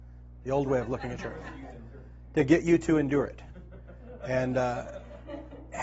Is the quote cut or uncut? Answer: uncut